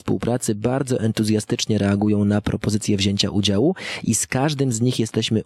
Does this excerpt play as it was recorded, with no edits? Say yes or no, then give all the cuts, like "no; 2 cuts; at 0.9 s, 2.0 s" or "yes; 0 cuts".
yes; 0 cuts